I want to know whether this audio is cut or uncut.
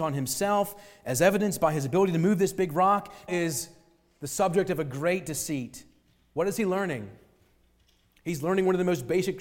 cut